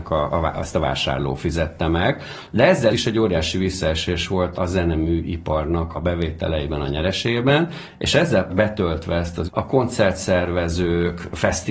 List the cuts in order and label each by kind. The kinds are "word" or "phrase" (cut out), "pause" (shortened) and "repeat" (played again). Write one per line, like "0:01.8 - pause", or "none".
0:02.9 - word
0:04.6 - word
0:05.9 - word
0:08.5 - phrase
0:09.5 - phrase